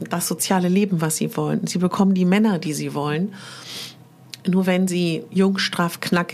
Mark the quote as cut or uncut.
uncut